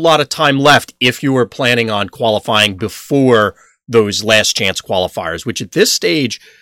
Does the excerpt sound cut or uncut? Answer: uncut